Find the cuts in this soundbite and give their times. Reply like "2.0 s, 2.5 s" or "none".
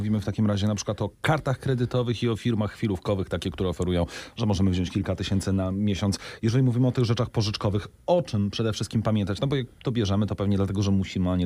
1.1 s